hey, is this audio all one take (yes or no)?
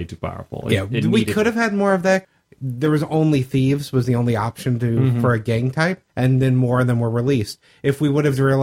no